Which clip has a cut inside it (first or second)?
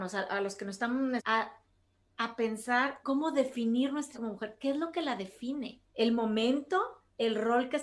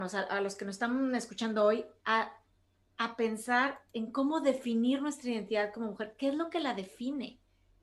first